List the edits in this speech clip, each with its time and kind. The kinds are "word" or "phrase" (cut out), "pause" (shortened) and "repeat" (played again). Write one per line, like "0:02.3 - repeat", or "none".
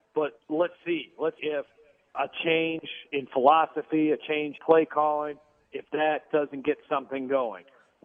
0:01.4 - word
0:02.1 - word
0:04.6 - word